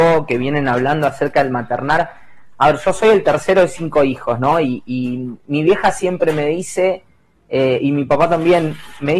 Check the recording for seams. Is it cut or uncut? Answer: uncut